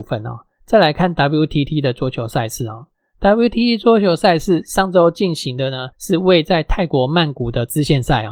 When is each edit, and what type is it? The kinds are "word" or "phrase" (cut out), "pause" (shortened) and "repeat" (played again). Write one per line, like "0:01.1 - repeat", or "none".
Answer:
0:05.9 - pause